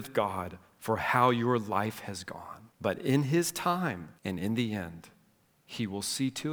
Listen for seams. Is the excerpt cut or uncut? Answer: cut